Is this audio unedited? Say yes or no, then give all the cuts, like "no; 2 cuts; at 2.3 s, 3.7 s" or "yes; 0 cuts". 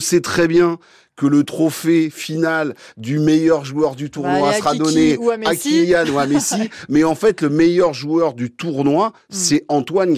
yes; 0 cuts